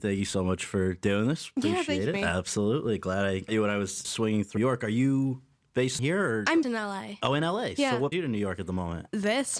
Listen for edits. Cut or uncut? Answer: cut